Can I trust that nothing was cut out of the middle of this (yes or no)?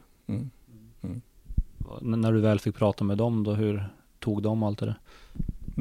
yes